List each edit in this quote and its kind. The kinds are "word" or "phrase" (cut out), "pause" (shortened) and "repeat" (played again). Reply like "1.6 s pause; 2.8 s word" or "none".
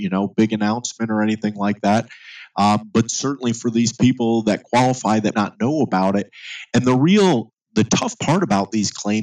5.3 s word